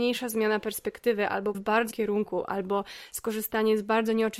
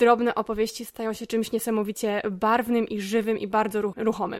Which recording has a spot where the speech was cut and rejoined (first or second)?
first